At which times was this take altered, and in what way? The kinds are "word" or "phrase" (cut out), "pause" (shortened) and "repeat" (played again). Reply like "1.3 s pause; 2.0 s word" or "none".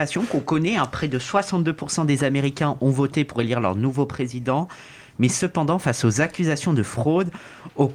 none